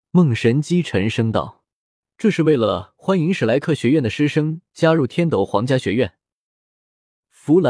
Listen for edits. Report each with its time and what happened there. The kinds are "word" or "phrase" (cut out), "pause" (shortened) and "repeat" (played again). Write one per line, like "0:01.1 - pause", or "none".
none